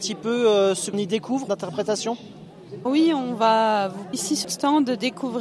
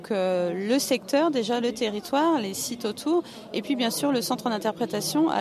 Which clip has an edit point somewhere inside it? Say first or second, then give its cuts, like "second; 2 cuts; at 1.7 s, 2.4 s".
first; 5 cuts; at 0.9 s, 1.5 s, 2.9 s, 4.1 s, 4.4 s